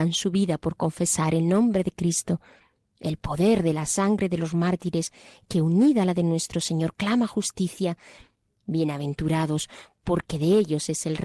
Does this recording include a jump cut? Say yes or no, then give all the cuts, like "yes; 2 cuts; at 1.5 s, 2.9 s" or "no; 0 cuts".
no; 0 cuts